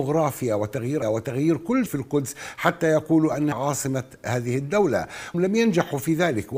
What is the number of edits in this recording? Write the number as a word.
four